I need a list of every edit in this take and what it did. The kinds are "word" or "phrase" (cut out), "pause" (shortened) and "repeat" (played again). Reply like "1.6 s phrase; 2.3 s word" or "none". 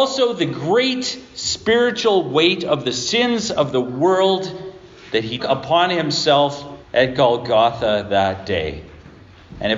5.4 s word; 6.8 s pause